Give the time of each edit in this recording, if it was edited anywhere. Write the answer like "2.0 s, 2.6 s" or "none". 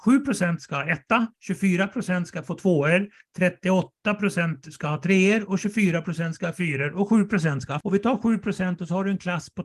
1.3 s, 7.8 s